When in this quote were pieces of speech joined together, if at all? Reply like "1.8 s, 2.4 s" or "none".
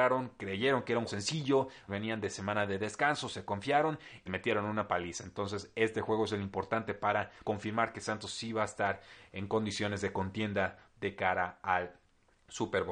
1.1 s, 1.9 s, 4.3 s, 7.4 s